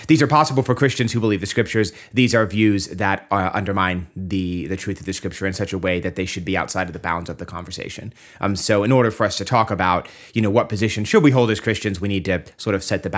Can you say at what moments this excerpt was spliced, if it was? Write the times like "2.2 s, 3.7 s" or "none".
none